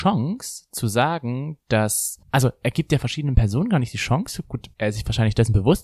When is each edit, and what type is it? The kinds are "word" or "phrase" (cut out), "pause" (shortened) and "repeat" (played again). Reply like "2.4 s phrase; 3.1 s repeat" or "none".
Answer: 2.2 s pause; 4.7 s pause